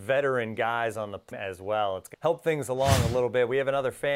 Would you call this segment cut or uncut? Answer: cut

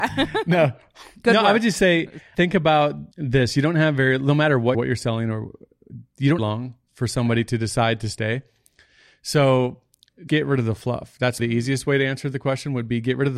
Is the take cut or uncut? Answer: cut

